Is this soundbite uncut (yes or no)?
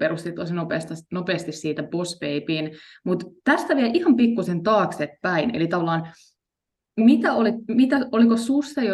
yes